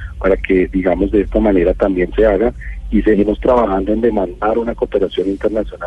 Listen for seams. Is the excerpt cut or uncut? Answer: uncut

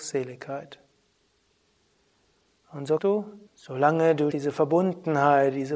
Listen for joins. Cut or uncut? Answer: cut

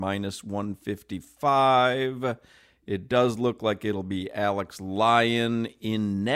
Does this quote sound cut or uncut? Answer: uncut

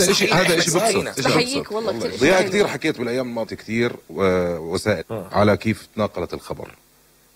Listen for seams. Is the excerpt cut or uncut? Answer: cut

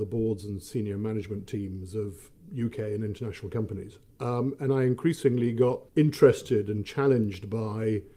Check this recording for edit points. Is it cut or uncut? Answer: cut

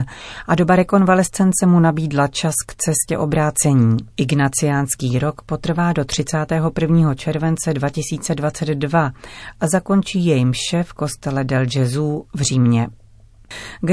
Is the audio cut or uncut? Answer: cut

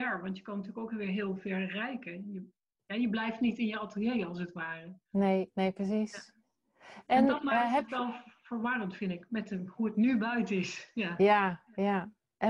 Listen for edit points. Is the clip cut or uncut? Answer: uncut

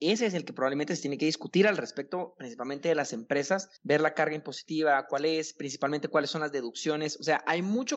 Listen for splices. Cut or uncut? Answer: cut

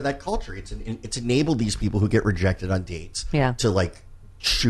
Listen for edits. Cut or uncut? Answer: uncut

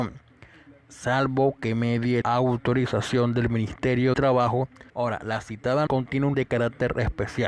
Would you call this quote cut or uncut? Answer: cut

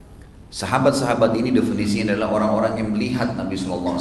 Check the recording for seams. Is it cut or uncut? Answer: uncut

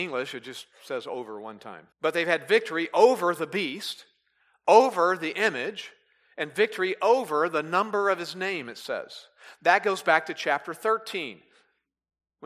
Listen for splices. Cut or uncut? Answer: cut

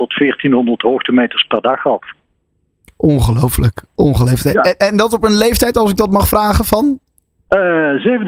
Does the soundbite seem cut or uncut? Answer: uncut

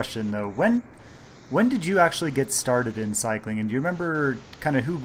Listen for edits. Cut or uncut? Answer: uncut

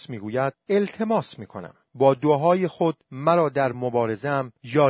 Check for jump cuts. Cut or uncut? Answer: uncut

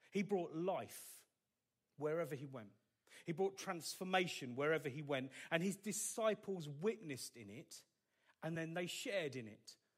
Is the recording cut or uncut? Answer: uncut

